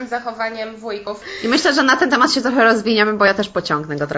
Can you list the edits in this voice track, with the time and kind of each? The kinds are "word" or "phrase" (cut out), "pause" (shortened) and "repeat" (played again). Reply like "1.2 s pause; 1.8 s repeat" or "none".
none